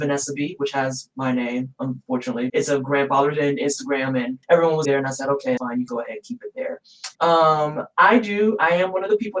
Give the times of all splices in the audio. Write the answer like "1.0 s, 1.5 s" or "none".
2.5 s, 4.4 s, 4.8 s, 5.6 s, 5.9 s, 7.1 s